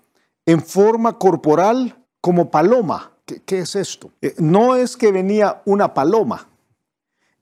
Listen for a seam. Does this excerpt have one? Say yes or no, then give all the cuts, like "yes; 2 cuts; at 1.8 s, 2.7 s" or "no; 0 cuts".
yes; 3 cuts; at 2.0 s, 3.2 s, 4.2 s